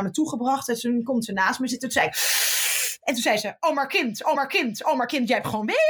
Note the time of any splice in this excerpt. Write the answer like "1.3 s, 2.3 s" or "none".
4.4 s